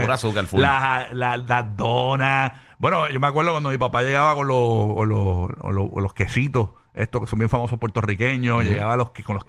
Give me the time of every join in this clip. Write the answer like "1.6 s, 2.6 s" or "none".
none